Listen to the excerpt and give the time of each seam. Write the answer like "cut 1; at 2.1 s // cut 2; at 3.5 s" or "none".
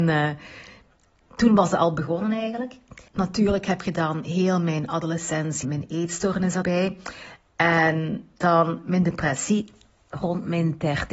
cut 1; at 3.1 s // cut 2; at 5.6 s // cut 3; at 6.6 s // cut 4; at 8.3 s